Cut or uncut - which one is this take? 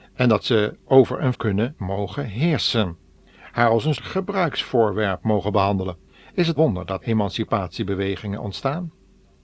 cut